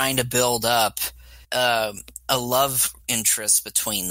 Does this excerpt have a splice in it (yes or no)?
yes